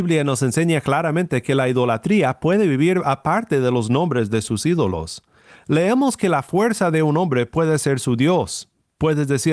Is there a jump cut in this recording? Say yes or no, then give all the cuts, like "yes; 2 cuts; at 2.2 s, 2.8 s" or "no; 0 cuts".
no; 0 cuts